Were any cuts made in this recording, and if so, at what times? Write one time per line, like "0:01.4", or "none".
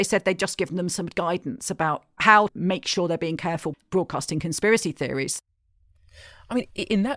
0:02.5
0:03.7